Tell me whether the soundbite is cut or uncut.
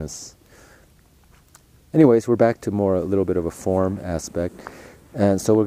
uncut